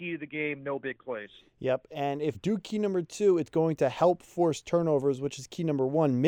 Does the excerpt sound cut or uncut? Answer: cut